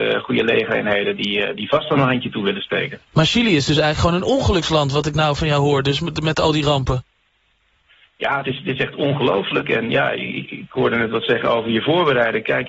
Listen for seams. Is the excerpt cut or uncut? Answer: uncut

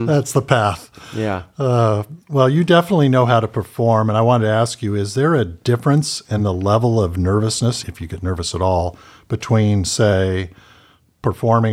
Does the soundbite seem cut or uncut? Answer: uncut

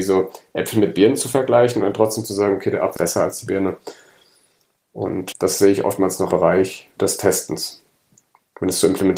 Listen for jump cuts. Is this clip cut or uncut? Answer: cut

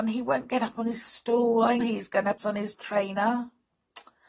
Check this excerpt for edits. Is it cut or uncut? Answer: cut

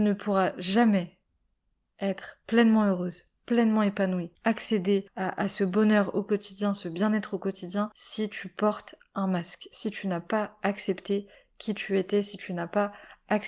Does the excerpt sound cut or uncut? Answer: uncut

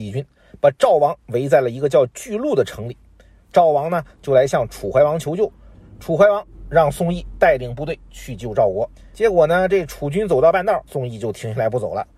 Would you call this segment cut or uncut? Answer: cut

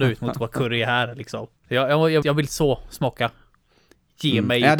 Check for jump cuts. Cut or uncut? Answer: cut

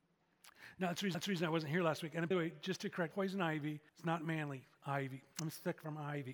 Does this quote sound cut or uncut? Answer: cut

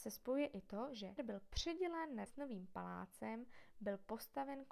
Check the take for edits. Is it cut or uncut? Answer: cut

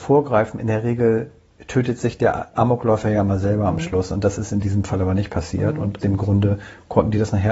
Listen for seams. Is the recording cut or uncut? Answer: cut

